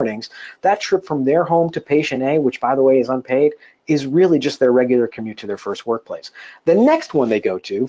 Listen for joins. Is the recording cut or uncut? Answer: uncut